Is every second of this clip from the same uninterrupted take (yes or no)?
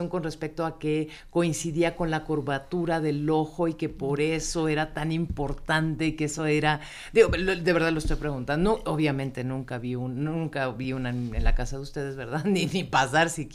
yes